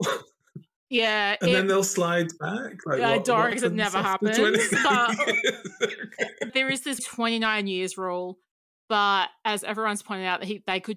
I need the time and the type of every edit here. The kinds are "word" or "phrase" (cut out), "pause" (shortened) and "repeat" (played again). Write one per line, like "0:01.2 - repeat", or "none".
0:03.5 - word
0:06.5 - word
0:07.0 - word